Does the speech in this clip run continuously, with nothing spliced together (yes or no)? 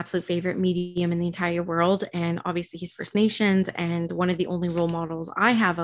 yes